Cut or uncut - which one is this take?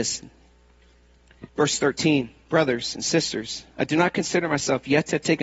cut